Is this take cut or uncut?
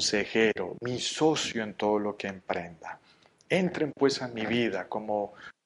uncut